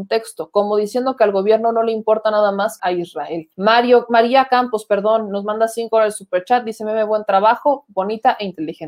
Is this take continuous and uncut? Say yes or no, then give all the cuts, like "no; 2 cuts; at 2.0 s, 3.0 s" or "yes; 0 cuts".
no; 2 cuts; at 2.8 s, 3.5 s